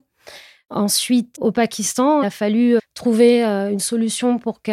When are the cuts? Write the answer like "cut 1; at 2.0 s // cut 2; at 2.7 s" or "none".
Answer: cut 1; at 1.3 s // cut 2; at 2.2 s // cut 3; at 2.8 s